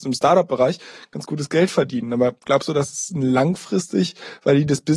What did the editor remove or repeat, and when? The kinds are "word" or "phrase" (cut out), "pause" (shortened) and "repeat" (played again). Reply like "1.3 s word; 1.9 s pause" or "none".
none